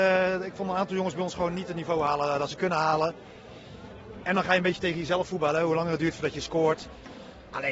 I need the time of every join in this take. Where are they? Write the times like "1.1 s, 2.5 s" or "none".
none